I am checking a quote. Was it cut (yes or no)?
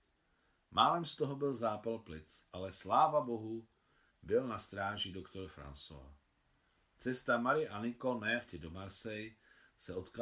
no